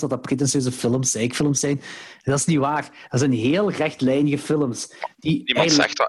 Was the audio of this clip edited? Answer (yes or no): no